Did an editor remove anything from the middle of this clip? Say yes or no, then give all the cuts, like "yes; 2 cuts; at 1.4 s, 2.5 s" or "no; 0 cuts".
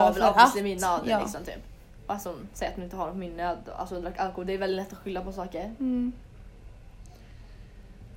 no; 0 cuts